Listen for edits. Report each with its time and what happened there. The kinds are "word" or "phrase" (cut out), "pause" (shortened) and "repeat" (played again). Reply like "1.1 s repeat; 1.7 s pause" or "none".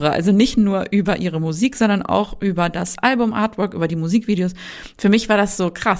none